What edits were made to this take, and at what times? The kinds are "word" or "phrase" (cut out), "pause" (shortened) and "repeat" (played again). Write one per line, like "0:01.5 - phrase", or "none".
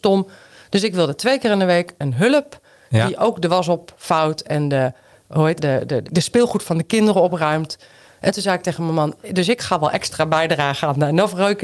0:05.6 - word
0:06.0 - word